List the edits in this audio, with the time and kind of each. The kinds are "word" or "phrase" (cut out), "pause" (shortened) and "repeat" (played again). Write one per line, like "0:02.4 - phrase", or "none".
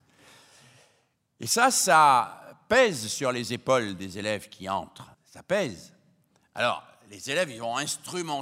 0:05.1 - pause